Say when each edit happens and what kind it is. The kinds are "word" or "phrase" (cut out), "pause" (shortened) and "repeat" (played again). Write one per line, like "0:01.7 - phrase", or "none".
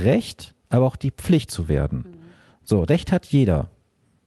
0:01.5 - word
0:02.9 - word